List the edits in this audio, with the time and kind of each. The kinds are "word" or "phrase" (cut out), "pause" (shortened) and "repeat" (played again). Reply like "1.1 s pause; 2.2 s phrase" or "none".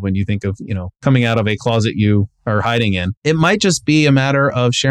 3.2 s pause